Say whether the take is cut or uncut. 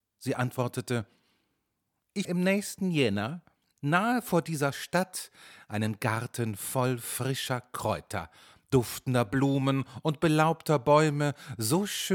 cut